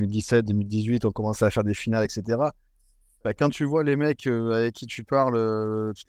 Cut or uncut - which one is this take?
uncut